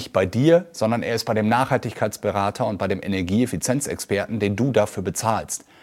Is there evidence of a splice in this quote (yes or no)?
no